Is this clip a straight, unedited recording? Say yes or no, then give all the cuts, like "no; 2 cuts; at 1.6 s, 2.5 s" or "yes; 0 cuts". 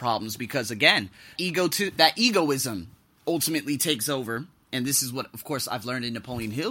no; 2 cuts; at 1.4 s, 2.0 s